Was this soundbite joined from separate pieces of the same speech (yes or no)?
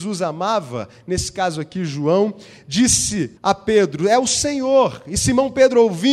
yes